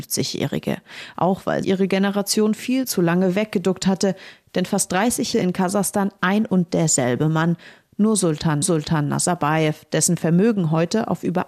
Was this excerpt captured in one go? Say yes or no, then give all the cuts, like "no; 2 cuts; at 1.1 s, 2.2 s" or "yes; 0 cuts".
no; 3 cuts; at 1.6 s, 5.3 s, 8.6 s